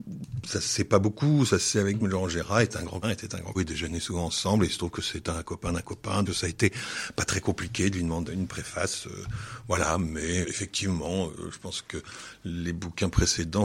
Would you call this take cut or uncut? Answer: cut